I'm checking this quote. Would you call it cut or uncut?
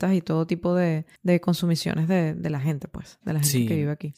cut